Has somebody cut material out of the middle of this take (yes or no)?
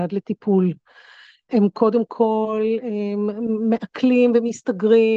no